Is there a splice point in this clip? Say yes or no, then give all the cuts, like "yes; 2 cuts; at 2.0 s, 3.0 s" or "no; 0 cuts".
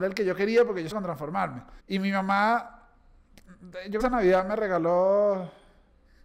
yes; 3 cuts; at 0.9 s, 1.8 s, 4.0 s